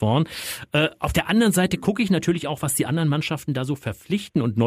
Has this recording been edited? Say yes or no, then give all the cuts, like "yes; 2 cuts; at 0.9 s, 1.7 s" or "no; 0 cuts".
no; 0 cuts